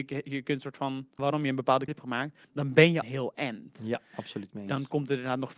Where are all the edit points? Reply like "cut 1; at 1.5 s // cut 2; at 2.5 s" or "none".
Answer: cut 1; at 1.2 s // cut 2; at 1.9 s // cut 3; at 2.4 s // cut 4; at 3.0 s